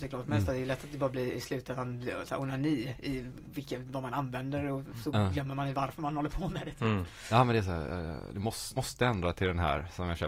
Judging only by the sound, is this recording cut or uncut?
cut